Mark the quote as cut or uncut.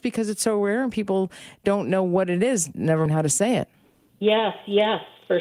cut